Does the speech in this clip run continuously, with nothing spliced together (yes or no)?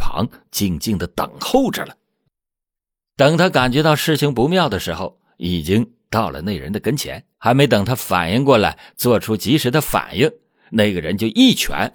no